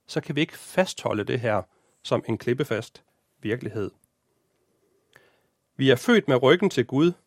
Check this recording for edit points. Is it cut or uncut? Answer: uncut